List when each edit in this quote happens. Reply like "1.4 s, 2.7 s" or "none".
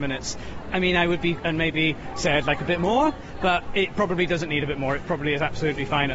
1.4 s